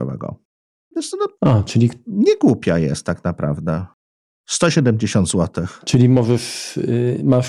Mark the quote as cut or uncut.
uncut